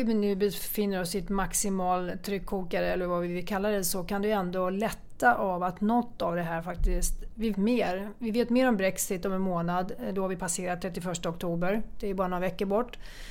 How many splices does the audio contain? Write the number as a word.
one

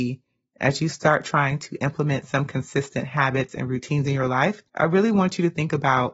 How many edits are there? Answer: one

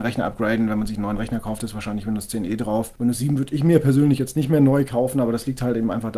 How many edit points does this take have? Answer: zero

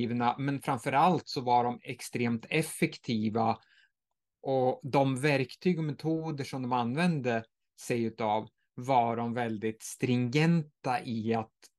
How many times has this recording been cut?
zero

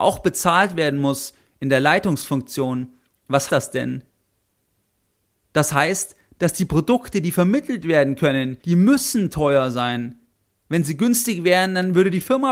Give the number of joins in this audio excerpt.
two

